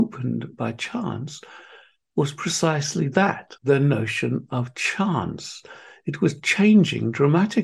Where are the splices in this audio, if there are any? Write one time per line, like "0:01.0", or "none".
0:03.6